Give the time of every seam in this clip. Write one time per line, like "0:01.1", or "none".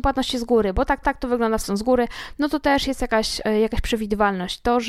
0:01.0
0:01.6